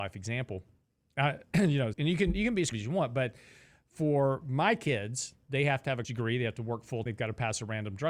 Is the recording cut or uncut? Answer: cut